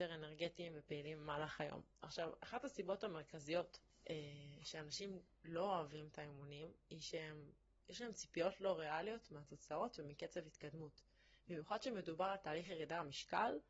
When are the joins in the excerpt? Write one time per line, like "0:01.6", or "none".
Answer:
none

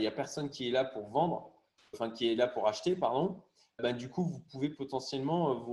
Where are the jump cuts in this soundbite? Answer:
0:01.9
0:03.8

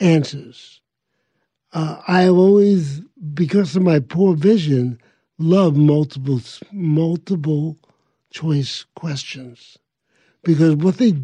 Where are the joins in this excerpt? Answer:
none

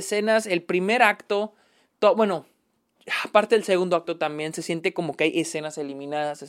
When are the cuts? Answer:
none

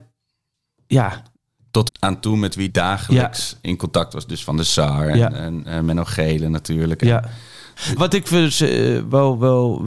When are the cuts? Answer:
0:01.9
0:02.7
0:08.0

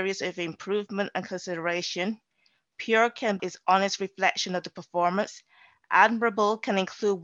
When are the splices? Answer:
0:03.4

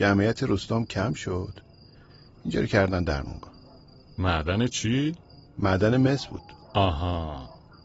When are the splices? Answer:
none

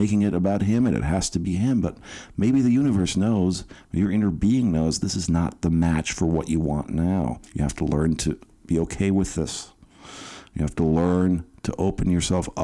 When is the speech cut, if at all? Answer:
0:07.5

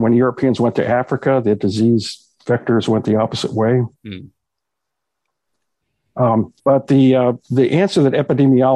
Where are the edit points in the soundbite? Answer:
0:04.0
0:06.6

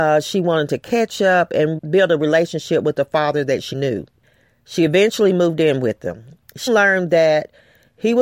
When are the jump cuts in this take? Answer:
0:01.8
0:03.7
0:06.7

